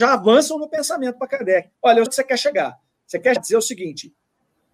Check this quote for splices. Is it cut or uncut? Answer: cut